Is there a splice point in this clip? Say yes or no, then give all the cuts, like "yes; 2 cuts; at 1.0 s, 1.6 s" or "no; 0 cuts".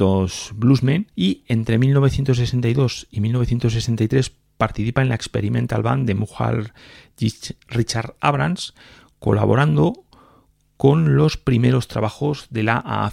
yes; 1 cut; at 1.1 s